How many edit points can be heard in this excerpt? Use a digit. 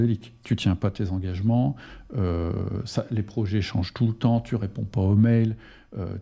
0